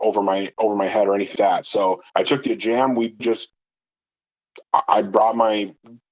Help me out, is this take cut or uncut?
cut